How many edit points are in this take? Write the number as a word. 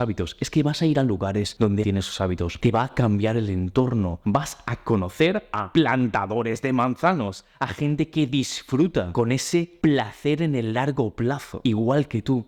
one